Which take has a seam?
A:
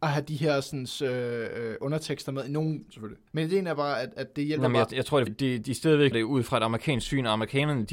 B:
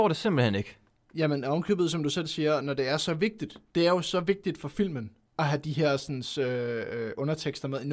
A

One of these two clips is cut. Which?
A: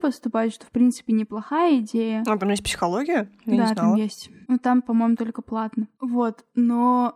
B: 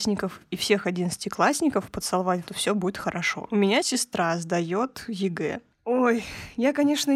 B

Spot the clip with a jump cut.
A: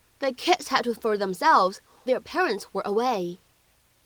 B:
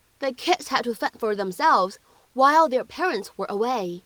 A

